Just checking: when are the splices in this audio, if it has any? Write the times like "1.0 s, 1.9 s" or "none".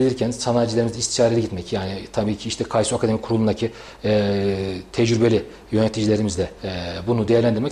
6.6 s